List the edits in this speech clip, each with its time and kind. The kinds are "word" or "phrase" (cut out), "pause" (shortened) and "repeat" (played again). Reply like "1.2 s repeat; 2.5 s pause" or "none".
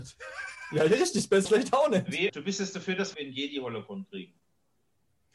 1.5 s word; 2.3 s word; 3.1 s phrase